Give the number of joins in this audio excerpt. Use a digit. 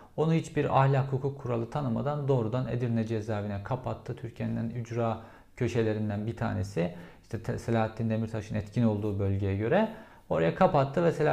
0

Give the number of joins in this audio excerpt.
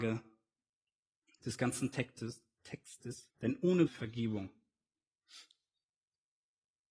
2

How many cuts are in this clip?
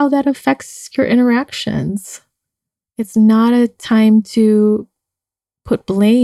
0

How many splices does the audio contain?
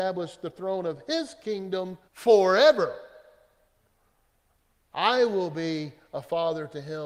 1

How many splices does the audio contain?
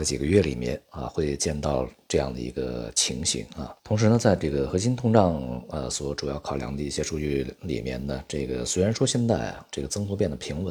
1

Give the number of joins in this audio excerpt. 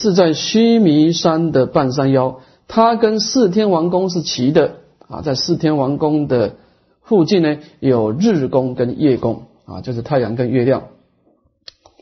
0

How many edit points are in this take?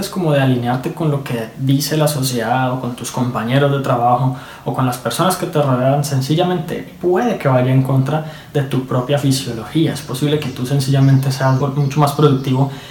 1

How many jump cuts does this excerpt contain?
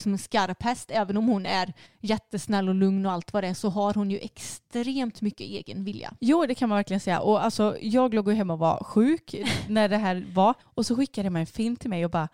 3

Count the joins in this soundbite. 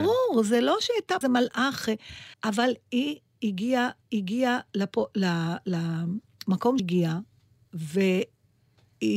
4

